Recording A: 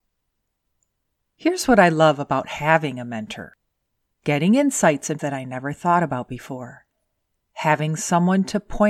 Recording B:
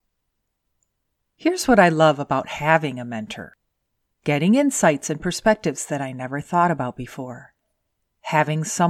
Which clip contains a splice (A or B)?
A